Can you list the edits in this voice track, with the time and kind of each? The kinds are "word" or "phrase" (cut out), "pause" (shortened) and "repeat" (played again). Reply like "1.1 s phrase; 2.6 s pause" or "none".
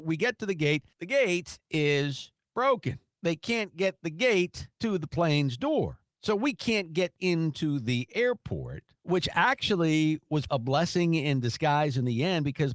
7.2 s word; 10.5 s word